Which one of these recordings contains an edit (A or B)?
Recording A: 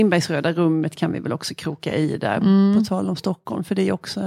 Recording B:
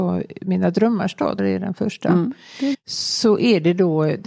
B